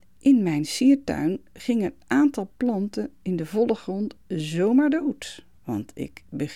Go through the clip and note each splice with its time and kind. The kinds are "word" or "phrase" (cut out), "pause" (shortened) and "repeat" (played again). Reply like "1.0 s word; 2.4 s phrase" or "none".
none